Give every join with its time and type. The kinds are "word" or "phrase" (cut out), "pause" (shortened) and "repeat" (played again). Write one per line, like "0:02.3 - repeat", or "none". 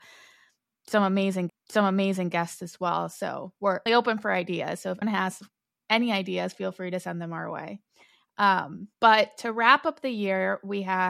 0:01.5 - repeat
0:03.9 - word
0:05.0 - word
0:08.9 - pause